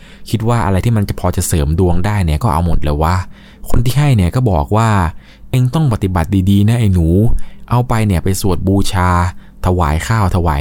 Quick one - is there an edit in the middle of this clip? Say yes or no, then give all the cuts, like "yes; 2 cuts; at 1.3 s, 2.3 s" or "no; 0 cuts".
no; 0 cuts